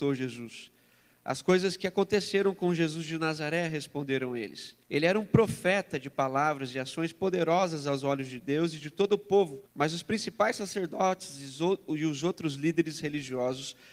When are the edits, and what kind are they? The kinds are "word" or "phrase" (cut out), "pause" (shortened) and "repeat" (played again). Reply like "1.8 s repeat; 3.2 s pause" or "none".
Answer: 4.8 s pause; 9.7 s pause